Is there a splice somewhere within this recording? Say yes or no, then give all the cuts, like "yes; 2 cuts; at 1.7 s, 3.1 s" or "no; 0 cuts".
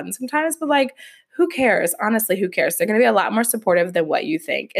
no; 0 cuts